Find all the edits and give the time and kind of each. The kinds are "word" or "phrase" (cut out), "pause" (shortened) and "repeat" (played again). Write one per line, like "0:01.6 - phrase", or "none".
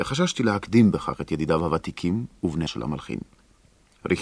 0:02.7 - word